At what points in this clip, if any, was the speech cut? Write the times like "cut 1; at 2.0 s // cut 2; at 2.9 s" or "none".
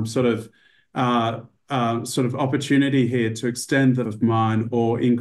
cut 1; at 4.0 s